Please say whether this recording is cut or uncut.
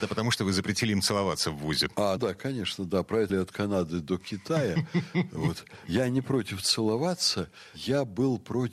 cut